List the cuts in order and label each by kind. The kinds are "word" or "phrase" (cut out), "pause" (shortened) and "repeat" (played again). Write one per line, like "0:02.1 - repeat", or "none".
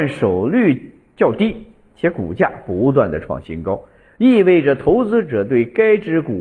none